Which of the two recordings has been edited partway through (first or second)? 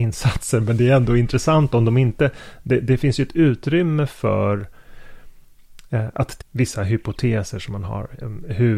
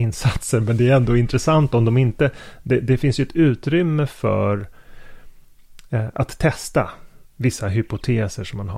first